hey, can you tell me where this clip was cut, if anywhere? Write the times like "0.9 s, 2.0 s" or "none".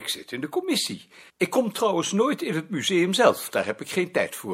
1.3 s